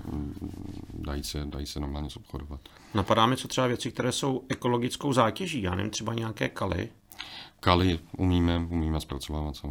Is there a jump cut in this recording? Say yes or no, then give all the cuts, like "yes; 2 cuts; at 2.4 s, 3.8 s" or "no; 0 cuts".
no; 0 cuts